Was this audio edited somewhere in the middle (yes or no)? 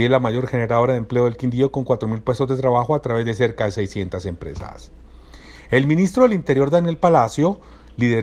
no